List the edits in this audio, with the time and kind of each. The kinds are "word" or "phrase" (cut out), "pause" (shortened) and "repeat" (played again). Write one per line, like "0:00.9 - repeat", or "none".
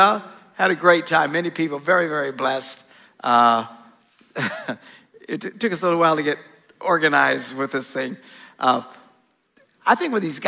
none